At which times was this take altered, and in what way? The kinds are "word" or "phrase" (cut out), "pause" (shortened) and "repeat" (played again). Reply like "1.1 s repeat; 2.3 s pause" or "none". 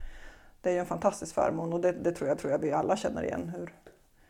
2.4 s repeat